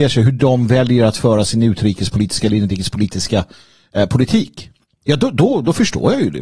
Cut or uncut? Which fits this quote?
uncut